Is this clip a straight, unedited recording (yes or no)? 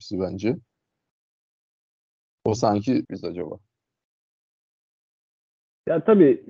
no